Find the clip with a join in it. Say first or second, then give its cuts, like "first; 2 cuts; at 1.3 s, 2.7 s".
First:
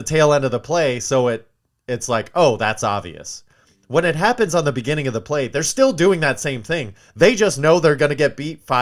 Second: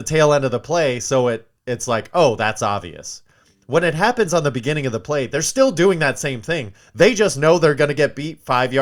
second; 1 cut; at 1.6 s